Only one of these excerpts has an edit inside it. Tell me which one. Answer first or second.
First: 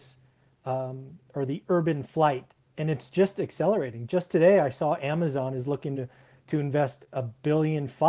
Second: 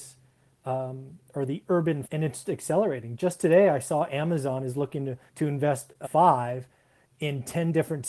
second